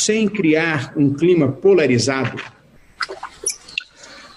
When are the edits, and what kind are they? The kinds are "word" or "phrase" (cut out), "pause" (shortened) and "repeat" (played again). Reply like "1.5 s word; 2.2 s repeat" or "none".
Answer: none